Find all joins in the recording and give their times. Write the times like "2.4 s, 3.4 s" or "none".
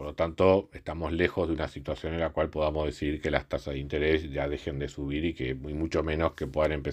none